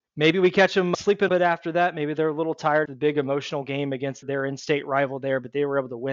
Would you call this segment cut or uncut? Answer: cut